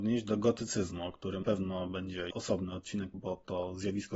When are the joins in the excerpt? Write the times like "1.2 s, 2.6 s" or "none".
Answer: 1.4 s, 2.3 s, 3.1 s